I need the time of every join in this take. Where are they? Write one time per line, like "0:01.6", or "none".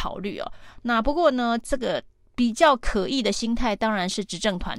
none